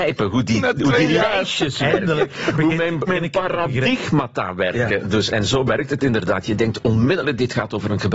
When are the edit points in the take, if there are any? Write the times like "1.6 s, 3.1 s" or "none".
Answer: 3.1 s, 5.3 s